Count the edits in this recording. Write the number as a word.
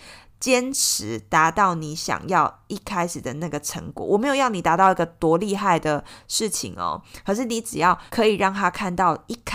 one